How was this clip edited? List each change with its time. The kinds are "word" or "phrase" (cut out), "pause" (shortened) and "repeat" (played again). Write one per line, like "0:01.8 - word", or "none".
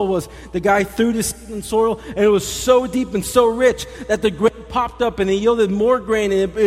none